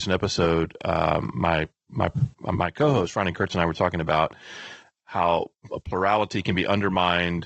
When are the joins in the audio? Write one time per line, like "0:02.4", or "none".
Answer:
none